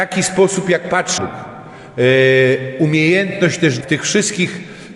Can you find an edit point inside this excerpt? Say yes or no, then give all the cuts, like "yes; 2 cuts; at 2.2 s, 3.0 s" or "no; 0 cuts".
yes; 2 cuts; at 1.2 s, 3.8 s